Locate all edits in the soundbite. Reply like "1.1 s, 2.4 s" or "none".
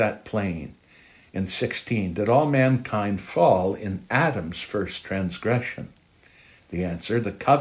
none